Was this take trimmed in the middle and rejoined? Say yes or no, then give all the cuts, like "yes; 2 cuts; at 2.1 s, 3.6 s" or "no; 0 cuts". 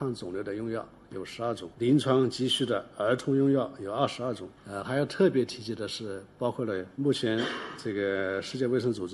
no; 0 cuts